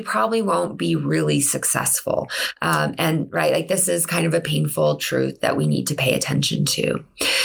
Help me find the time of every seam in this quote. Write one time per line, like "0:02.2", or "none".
none